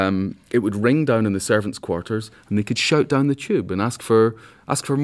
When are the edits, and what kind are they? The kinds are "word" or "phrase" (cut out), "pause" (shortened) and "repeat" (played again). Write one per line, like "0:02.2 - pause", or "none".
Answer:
none